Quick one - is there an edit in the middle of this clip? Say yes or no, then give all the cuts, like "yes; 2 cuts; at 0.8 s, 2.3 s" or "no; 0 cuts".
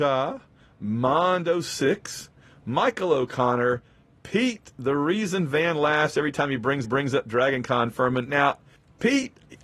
yes; 1 cut; at 6.8 s